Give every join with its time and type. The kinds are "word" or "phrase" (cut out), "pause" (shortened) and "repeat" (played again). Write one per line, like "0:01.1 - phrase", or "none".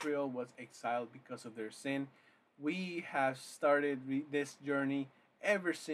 none